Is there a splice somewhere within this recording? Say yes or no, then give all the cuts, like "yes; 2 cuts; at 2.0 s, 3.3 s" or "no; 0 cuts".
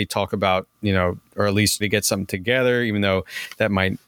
yes; 1 cut; at 1.8 s